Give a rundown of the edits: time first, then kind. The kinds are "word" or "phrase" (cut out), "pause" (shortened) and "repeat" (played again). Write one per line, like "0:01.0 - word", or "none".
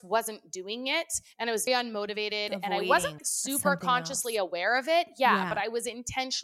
0:01.7 - word
0:03.2 - word